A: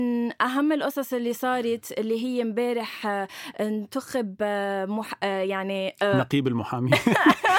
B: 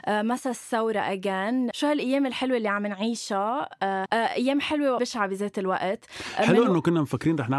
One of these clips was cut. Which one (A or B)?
B